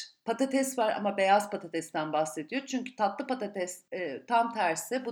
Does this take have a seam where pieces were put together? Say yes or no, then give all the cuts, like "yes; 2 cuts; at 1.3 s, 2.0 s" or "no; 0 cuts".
yes; 1 cut; at 3.9 s